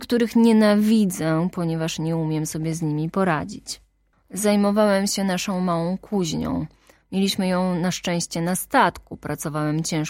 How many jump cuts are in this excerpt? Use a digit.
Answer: 0